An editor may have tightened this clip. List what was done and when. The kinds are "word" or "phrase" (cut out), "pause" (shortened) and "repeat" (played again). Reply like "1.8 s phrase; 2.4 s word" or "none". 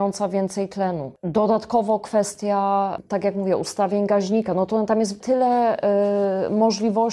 none